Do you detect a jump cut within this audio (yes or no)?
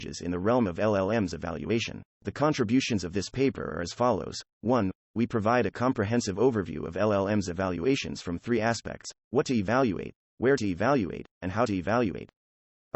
yes